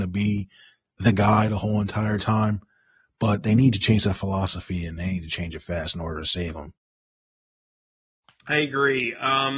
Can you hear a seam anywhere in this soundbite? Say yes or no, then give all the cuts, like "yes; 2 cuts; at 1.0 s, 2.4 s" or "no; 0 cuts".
no; 0 cuts